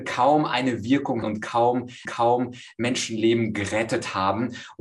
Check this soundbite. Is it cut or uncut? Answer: cut